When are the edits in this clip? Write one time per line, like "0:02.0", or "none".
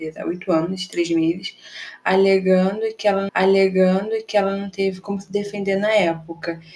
0:03.3